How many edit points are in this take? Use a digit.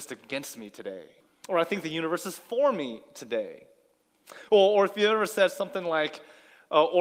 1